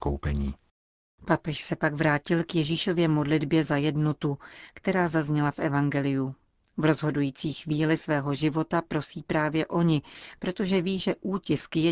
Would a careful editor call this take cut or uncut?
uncut